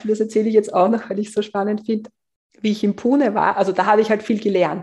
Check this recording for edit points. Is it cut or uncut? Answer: uncut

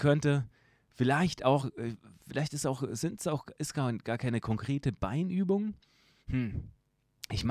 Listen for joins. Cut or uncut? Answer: uncut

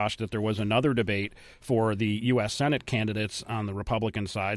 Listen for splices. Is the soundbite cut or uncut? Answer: uncut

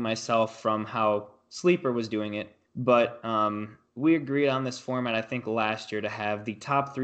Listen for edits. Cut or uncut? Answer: cut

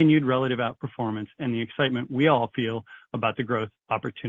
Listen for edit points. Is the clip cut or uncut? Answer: uncut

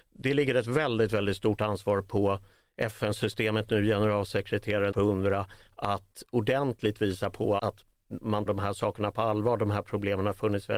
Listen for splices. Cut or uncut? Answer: cut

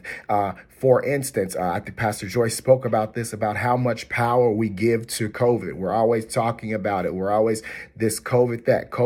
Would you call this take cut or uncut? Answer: uncut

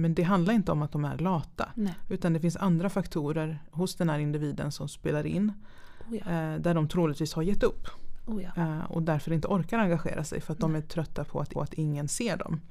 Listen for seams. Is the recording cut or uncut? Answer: cut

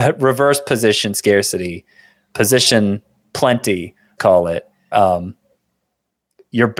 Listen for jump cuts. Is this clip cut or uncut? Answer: cut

